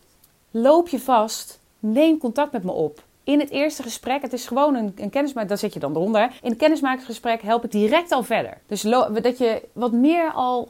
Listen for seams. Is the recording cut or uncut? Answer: cut